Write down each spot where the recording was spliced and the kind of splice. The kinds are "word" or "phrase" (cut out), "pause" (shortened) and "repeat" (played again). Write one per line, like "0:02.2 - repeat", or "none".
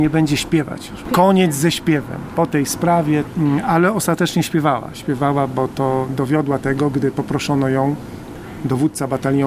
none

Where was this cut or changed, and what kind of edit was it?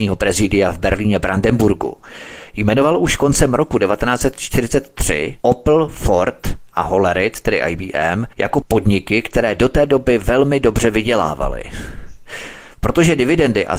0:05.4 - pause
0:08.3 - pause
0:12.7 - pause

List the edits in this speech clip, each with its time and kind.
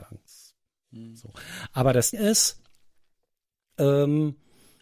0:02.1 - word

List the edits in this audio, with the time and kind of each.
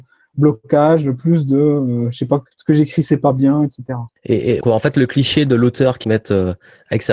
0:02.5 - pause
0:04.2 - pause
0:04.6 - word
0:06.0 - phrase

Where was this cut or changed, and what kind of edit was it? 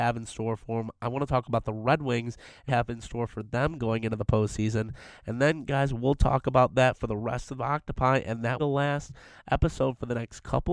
0:02.7 - phrase
0:08.6 - phrase

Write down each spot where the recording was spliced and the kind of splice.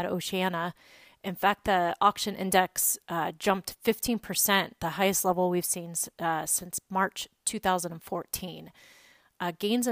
none

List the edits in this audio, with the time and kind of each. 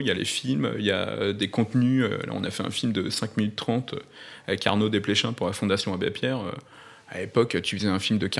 none

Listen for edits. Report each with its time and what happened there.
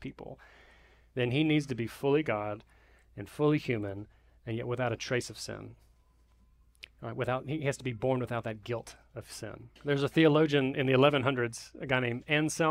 0:09.8 - pause

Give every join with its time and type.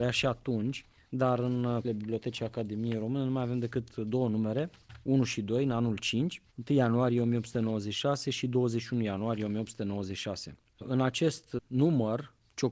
0:01.8 - word

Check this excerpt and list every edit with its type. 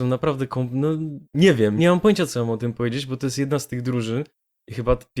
0:01.3 - pause
0:01.8 - word

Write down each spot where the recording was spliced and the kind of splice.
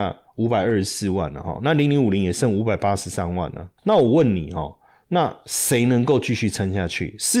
none

